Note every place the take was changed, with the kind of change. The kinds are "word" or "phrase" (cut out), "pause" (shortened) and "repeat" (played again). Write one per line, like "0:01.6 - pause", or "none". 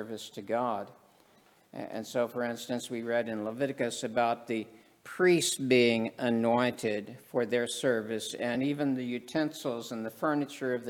none